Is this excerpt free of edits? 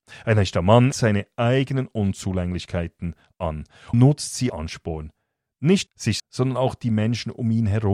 no; 5 cuts; at 0.9 s, 3.9 s, 4.5 s, 5.9 s, 6.2 s

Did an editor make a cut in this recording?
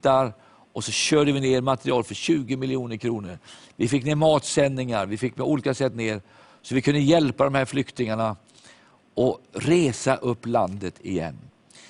no; 0 cuts

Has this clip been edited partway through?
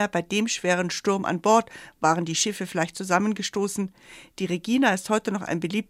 no; 0 cuts

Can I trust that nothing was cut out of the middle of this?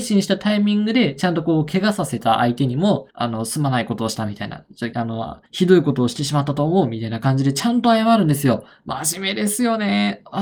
no; 3 cuts; at 3.1 s, 4.9 s, 5.5 s

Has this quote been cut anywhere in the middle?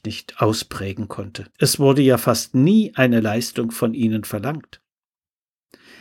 yes; 1 cut; at 1.5 s

